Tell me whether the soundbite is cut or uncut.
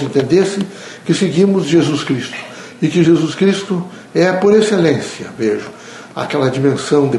uncut